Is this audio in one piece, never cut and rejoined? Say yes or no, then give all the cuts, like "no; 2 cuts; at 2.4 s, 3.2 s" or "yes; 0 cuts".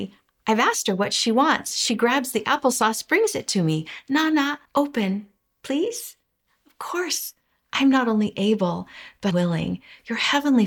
no; 2 cuts; at 4.7 s, 9.3 s